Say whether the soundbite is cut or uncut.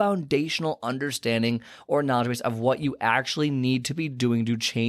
uncut